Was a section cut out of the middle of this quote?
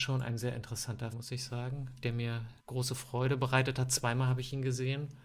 yes; 2 cuts; at 1.1 s, 2.6 s

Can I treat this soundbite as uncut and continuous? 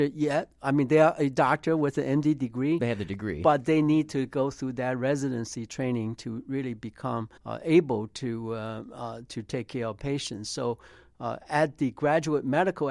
no; 1 cut; at 7.4 s

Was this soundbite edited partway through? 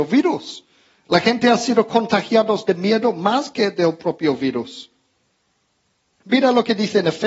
no; 0 cuts

